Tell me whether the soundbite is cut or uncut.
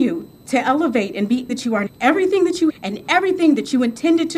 cut